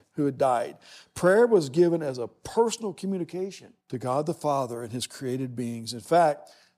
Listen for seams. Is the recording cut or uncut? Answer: cut